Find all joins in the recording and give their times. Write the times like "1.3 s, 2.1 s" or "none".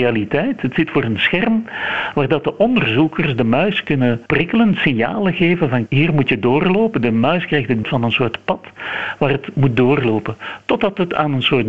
4.3 s, 5.9 s, 7.8 s